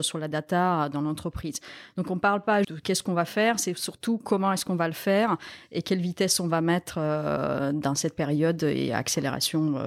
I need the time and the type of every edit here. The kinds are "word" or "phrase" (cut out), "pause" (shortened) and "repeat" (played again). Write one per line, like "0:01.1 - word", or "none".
0:02.6 - word